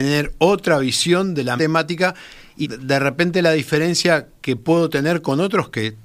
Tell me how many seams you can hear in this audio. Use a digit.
2